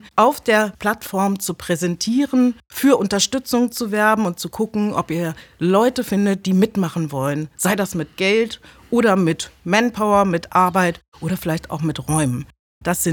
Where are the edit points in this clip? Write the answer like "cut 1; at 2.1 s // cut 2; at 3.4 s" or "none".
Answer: none